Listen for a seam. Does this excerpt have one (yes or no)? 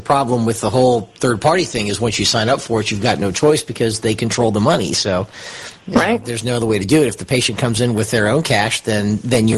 no